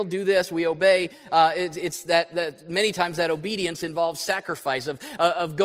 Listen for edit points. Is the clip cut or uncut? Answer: uncut